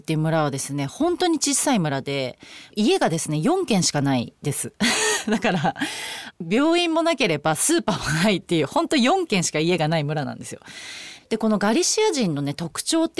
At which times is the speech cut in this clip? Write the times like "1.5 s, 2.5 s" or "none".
4.4 s

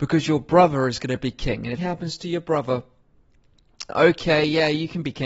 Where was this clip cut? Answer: 1.8 s, 3.9 s

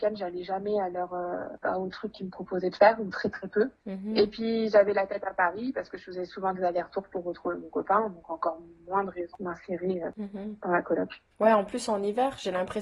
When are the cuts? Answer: 3.8 s, 11.3 s

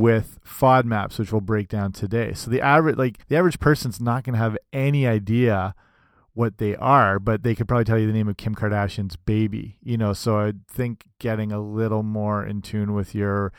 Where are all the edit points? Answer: 3.2 s

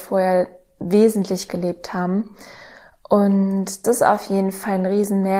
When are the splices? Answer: 1.5 s, 3.8 s

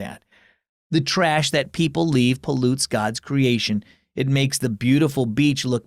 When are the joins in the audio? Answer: none

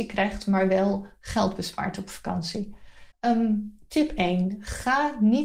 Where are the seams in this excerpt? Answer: 3.1 s

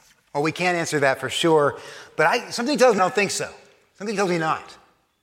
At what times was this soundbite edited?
3.0 s

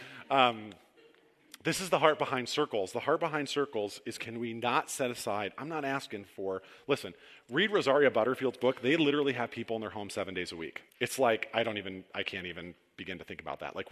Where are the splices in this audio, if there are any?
10.9 s

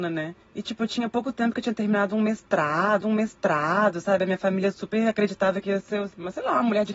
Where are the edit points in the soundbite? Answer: 3.0 s

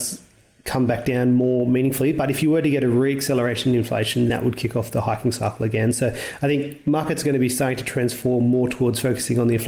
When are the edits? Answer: 4.3 s

